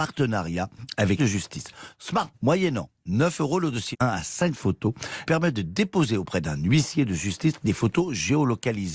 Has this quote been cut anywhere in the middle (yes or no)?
yes